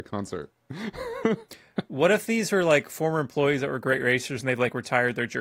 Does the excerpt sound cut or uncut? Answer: uncut